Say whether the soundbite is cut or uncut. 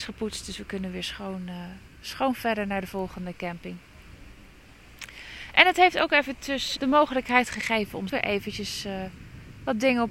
cut